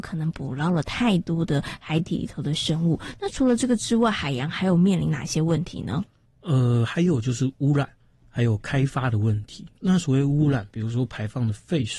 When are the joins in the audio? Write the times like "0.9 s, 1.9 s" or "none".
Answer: 6.3 s, 8.0 s, 9.7 s